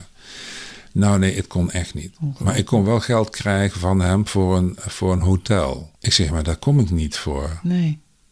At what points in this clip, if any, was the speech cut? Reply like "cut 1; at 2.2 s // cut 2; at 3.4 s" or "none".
cut 1; at 5.9 s